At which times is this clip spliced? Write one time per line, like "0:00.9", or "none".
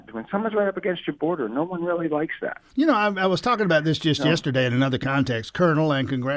none